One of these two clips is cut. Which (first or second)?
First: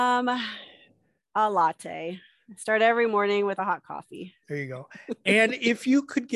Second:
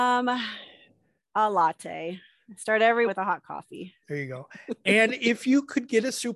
second